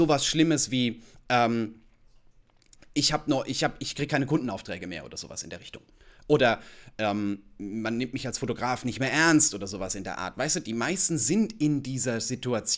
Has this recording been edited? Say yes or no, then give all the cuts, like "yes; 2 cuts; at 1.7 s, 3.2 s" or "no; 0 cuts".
no; 0 cuts